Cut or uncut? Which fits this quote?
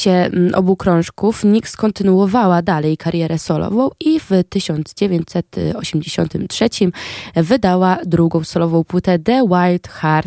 uncut